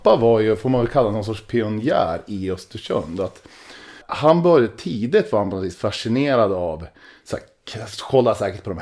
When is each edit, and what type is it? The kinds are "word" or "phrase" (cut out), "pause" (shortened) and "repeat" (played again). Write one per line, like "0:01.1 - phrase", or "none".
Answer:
0:04.0 - word